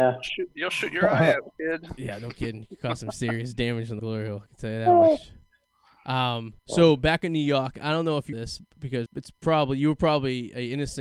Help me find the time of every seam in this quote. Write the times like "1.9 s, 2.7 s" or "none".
4.0 s, 6.6 s, 8.3 s, 9.1 s